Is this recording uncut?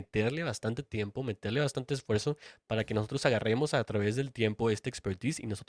yes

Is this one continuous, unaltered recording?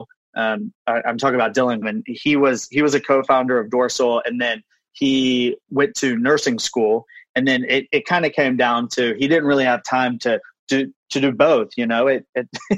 no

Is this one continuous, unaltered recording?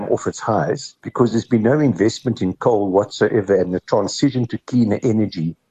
no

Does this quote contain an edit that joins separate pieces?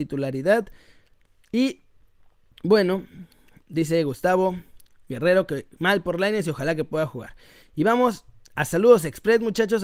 no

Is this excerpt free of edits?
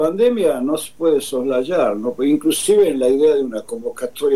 yes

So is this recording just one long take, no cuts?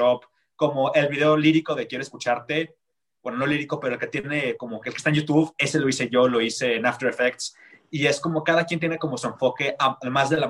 yes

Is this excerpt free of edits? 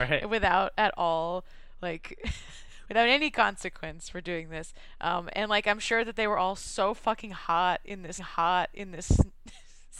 no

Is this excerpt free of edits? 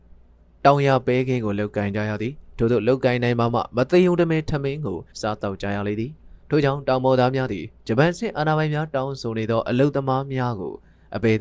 no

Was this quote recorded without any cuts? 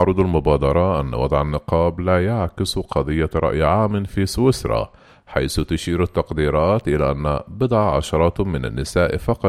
yes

